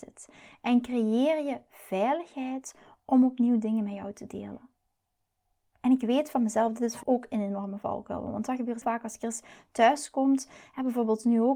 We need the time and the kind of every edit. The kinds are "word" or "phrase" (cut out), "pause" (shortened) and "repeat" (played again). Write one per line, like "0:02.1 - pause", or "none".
0:07.0 - word
0:08.8 - word